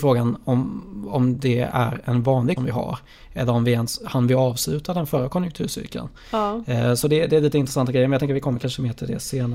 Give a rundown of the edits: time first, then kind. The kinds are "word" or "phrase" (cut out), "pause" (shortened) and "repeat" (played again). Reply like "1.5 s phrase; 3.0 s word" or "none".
2.6 s phrase